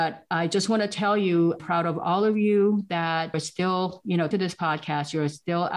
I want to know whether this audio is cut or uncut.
cut